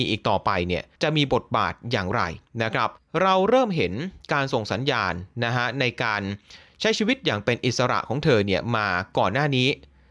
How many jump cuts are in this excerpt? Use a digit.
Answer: 2